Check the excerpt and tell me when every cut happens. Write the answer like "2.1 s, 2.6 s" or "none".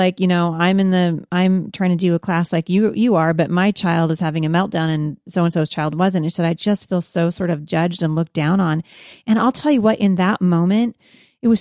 none